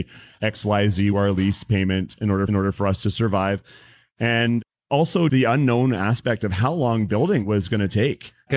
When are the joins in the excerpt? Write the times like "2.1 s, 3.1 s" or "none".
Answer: 1.1 s, 2.5 s, 5.3 s